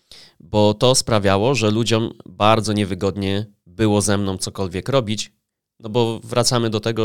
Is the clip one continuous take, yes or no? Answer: yes